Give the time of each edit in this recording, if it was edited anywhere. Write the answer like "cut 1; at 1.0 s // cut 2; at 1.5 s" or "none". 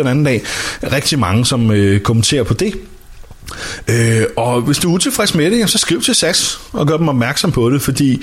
none